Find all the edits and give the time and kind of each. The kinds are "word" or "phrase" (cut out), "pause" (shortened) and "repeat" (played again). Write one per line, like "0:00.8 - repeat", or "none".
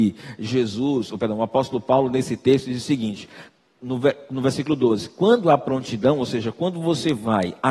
none